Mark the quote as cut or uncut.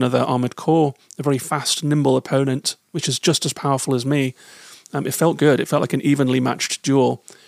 uncut